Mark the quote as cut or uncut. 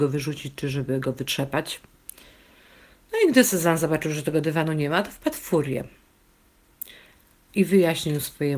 uncut